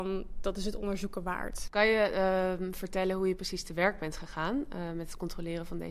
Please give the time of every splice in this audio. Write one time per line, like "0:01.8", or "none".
none